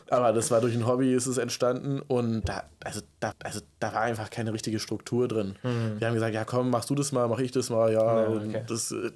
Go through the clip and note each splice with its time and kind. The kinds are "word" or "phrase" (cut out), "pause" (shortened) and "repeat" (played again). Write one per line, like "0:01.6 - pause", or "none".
0:02.4 - word
0:03.3 - repeat